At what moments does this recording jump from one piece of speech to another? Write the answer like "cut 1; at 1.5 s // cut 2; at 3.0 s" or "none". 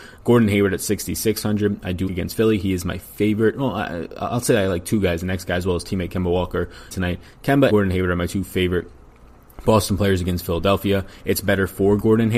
cut 1; at 2.1 s // cut 2; at 6.9 s // cut 3; at 7.7 s